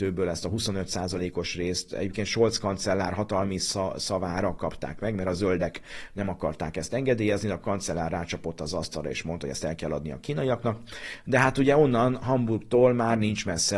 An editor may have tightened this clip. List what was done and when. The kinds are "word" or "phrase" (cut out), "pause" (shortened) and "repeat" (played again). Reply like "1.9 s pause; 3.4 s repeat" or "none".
none

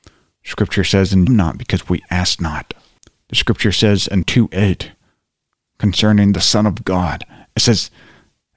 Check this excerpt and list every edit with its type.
1.3 s phrase; 3.0 s pause; 4.2 s word

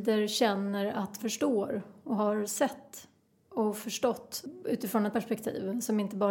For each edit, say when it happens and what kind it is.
1.2 s word; 5.1 s word

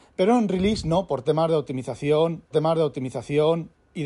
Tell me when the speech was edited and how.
2.5 s repeat

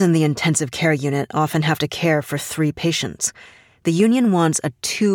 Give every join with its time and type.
none

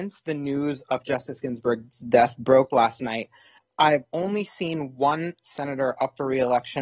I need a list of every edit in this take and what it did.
none

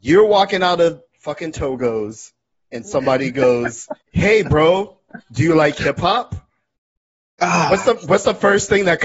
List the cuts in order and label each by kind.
4.0 s pause

